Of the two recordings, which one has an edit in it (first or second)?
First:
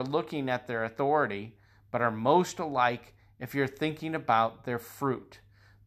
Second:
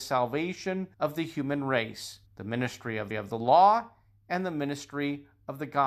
second